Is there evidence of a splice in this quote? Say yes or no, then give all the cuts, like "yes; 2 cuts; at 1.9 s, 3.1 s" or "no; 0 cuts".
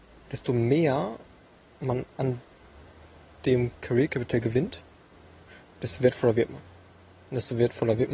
no; 0 cuts